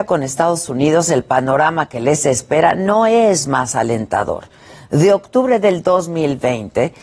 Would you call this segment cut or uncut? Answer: uncut